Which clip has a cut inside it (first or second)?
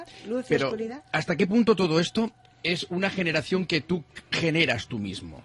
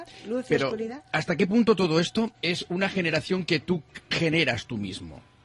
second